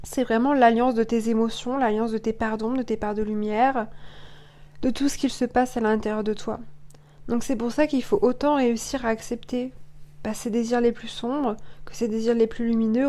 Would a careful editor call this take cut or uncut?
uncut